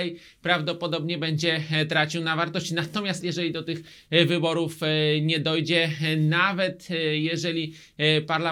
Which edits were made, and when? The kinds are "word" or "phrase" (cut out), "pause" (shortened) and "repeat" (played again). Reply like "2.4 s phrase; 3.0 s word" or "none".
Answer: 3.2 s word